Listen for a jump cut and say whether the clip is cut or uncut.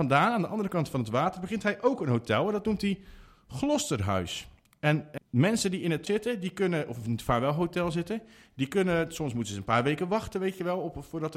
cut